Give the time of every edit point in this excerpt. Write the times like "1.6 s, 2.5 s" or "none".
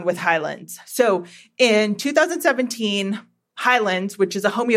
none